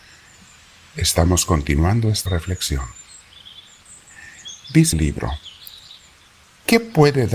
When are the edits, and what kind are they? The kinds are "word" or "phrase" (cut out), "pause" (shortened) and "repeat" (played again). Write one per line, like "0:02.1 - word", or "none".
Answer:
0:02.3 - word
0:04.9 - word